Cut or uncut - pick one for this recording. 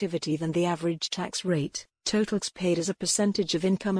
cut